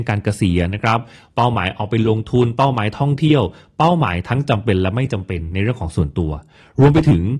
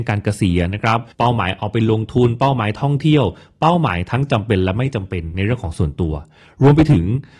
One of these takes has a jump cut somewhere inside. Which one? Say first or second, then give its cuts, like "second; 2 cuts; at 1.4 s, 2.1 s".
second; 1 cut; at 1.1 s